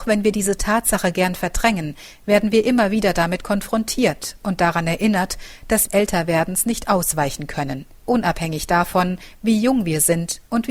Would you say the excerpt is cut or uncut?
cut